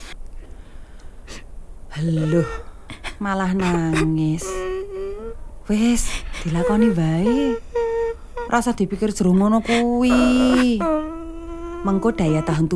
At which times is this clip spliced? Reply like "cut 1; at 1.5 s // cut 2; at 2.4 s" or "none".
none